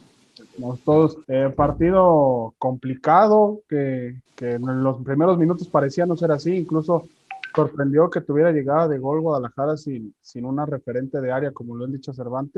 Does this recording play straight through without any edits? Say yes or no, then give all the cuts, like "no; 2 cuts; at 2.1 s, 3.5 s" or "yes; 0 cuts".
no; 2 cuts; at 1.2 s, 4.3 s